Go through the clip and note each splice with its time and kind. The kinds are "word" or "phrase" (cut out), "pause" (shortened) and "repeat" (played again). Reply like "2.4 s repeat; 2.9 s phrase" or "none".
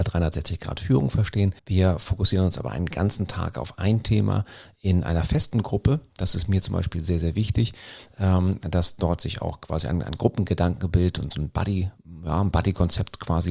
1.6 s pause